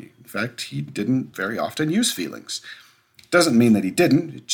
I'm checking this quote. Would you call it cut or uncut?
uncut